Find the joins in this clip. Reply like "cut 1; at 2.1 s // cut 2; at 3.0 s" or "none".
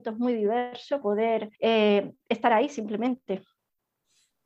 cut 1; at 1.0 s // cut 2; at 1.5 s